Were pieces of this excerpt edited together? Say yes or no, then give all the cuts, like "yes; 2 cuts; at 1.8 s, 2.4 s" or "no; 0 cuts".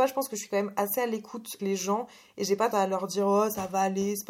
yes; 2 cuts; at 1.6 s, 2.7 s